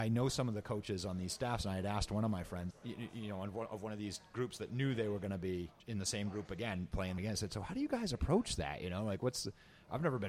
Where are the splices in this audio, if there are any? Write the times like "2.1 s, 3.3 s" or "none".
2.7 s, 5.8 s, 7.2 s